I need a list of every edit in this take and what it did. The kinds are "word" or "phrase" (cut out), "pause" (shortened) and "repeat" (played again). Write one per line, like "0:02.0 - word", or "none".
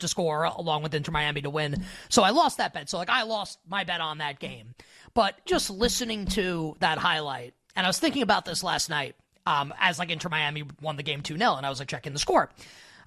0:05.5 - word